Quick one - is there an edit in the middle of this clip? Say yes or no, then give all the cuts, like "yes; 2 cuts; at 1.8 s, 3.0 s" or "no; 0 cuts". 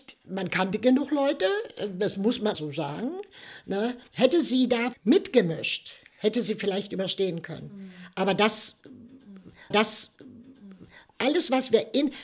yes; 4 cuts; at 2.5 s, 4.1 s, 4.9 s, 9.7 s